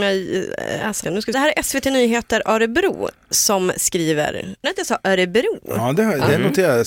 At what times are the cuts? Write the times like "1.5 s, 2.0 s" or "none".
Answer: 1.0 s, 1.3 s, 4.6 s